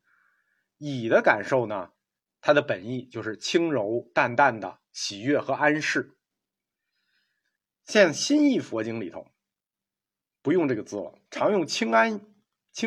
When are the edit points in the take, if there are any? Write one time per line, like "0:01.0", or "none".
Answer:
0:11.3